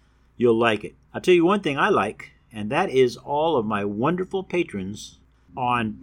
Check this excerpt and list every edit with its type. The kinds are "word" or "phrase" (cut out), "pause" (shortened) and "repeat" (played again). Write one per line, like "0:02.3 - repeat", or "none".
0:01.0 - pause